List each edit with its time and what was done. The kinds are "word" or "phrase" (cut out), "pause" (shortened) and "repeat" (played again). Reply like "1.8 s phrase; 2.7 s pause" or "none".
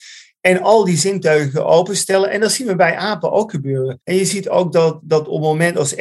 4.0 s pause